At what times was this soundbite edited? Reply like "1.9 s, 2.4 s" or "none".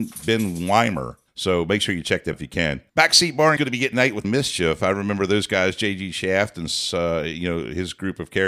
1.3 s, 2.3 s, 2.9 s, 3.6 s, 3.9 s, 4.2 s